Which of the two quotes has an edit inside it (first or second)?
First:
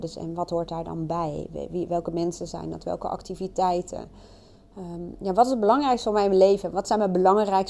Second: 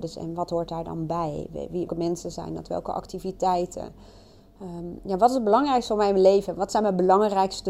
second